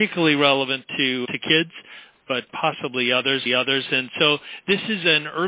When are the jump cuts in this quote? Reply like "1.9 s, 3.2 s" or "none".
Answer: 1.2 s, 2.5 s, 3.5 s